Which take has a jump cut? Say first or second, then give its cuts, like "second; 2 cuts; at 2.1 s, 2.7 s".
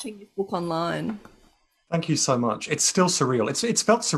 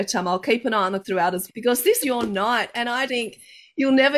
second; 4 cuts; at 1.0 s, 1.5 s, 2.0 s, 3.1 s